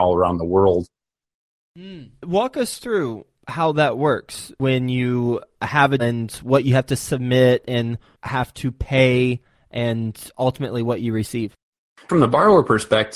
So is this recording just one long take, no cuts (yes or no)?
no